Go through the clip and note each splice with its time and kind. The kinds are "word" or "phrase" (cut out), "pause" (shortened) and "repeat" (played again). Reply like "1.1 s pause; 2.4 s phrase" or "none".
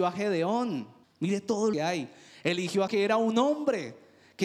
1.0 s pause; 1.7 s phrase; 2.9 s word